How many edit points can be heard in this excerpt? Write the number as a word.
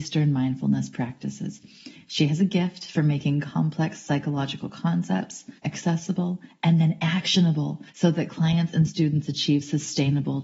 two